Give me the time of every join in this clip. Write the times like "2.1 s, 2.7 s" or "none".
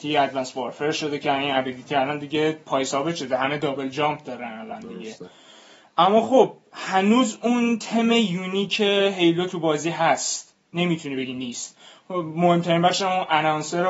none